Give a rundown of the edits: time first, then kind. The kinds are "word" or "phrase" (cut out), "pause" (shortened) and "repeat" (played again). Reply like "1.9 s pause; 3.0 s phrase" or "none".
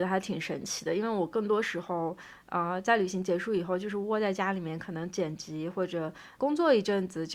none

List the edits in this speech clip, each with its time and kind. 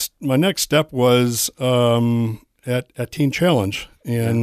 none

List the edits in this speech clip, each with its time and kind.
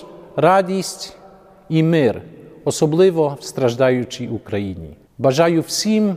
none

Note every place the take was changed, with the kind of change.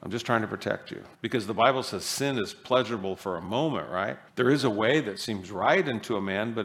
1.1 s pause; 4.3 s pause

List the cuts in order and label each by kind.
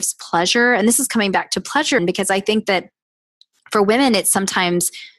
2.0 s word

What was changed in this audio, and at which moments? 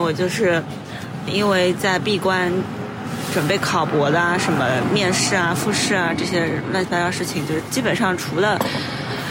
1.3 s word

